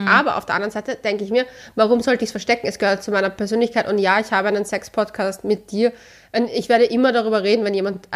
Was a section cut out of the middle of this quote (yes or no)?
no